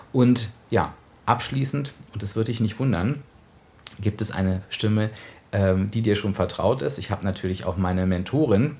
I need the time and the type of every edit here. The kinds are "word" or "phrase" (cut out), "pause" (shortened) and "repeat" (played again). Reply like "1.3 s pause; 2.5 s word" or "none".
none